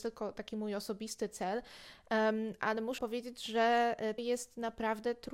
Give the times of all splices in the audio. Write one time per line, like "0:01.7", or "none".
0:03.0
0:04.2

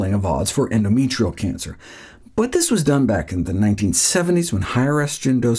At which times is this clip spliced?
none

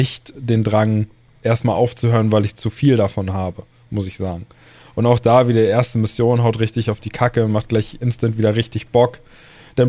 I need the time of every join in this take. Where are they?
none

